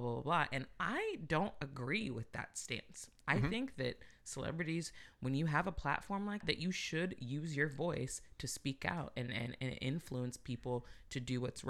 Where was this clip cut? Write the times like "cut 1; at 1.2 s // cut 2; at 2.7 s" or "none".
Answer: cut 1; at 6.4 s